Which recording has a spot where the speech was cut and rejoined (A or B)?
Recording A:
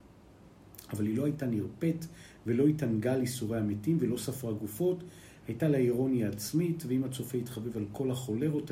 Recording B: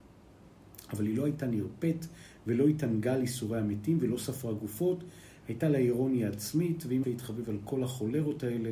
B